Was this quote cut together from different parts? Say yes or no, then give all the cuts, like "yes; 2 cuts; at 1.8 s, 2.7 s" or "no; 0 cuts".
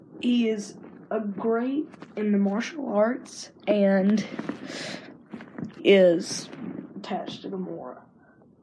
yes; 1 cut; at 5.8 s